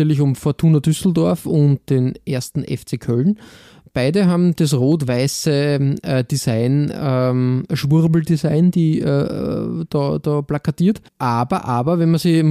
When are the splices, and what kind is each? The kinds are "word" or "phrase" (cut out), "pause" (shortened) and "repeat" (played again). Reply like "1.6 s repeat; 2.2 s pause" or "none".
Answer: none